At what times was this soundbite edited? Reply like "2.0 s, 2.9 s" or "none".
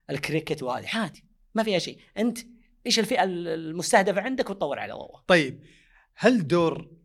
none

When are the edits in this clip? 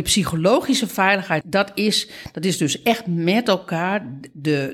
1.4 s

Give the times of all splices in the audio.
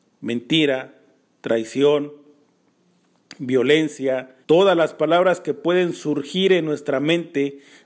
4.4 s

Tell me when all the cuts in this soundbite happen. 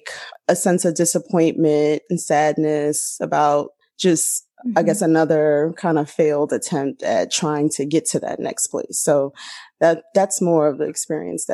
none

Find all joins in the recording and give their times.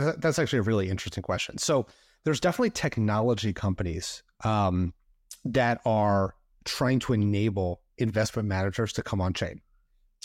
none

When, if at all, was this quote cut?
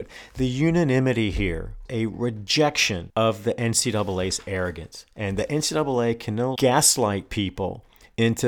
1.9 s, 6.6 s

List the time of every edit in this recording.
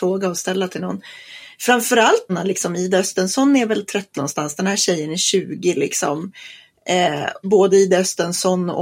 2.3 s, 4.1 s, 7.4 s

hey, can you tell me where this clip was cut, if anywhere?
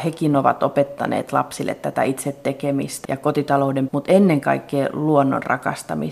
3.0 s, 3.9 s

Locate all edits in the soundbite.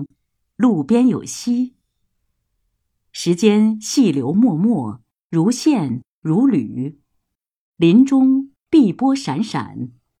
none

